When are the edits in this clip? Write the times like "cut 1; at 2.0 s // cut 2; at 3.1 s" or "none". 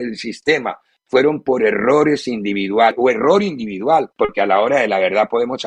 cut 1; at 4.1 s